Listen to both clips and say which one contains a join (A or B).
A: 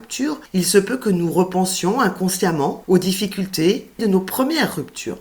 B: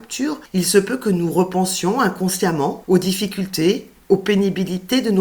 A